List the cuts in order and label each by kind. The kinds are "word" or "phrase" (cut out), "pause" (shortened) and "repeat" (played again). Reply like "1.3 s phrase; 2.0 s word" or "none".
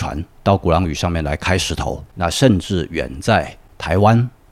2.1 s pause